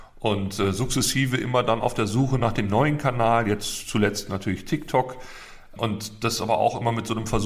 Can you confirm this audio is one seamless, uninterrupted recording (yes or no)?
yes